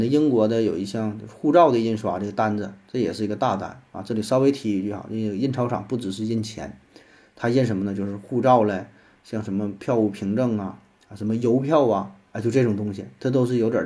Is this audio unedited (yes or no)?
yes